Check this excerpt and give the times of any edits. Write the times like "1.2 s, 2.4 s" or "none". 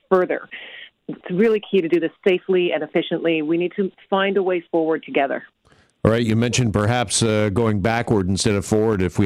none